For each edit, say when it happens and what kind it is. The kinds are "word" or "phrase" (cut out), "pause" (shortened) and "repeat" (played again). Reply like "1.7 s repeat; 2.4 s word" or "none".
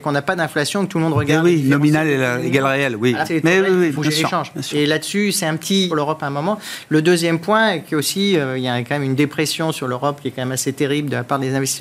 3.2 s word; 4.0 s word; 5.9 s phrase